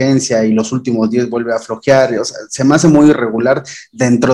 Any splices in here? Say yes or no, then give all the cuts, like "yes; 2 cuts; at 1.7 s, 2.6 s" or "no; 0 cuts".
no; 0 cuts